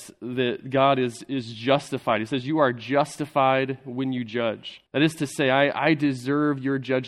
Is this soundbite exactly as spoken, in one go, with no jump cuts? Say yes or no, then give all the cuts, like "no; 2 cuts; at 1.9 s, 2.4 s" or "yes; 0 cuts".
no; 1 cut; at 4.9 s